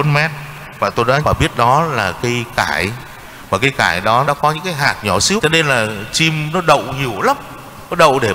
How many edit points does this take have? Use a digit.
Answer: 4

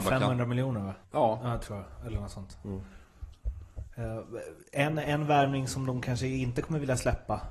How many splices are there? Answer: 1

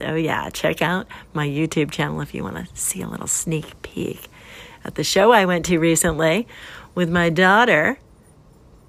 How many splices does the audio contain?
0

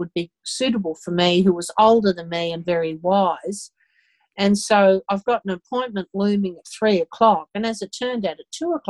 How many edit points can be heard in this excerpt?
0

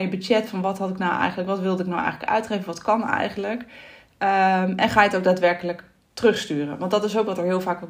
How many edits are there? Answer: 0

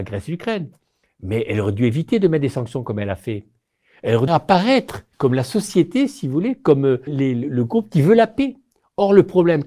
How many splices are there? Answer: 3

